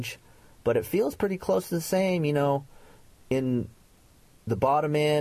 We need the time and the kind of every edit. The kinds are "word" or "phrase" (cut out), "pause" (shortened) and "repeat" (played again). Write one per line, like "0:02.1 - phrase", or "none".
none